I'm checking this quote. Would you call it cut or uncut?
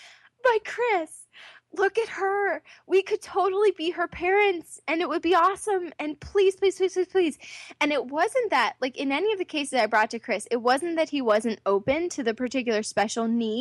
uncut